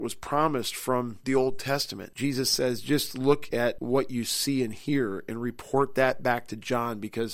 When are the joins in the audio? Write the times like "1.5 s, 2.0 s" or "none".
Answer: none